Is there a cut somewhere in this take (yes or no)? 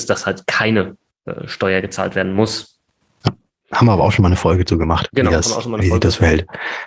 no